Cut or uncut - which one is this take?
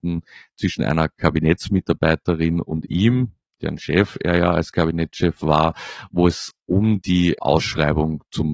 uncut